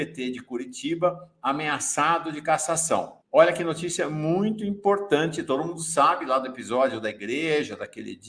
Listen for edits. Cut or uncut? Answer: cut